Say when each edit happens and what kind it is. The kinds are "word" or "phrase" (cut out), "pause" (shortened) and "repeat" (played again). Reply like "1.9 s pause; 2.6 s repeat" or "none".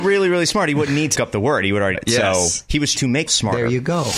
1.1 s word; 1.9 s word; 2.9 s word; 3.3 s word

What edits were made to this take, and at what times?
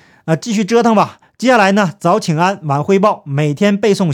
1.2 s pause

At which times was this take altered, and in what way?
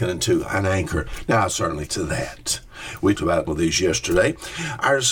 1.9 s phrase; 3.1 s word; 3.5 s word

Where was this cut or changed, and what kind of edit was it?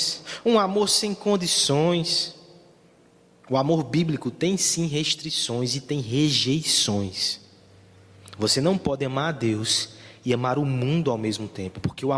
none

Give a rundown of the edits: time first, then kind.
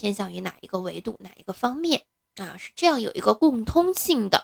none

